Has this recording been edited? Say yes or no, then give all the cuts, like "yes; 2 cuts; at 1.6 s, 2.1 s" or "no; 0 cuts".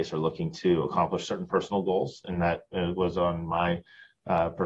no; 0 cuts